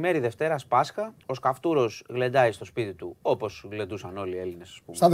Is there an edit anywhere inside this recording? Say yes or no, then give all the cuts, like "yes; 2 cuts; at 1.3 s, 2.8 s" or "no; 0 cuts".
yes; 1 cut; at 1.2 s